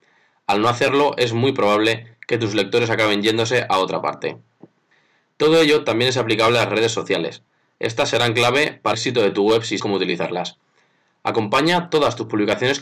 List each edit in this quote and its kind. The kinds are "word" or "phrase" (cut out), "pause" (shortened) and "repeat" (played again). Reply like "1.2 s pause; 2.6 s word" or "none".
8.9 s word; 9.8 s word